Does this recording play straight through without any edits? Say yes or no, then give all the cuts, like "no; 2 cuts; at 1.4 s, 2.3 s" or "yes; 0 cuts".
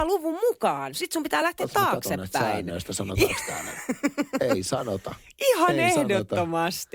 yes; 0 cuts